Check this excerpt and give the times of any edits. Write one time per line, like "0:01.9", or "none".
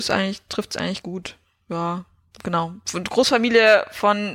0:01.0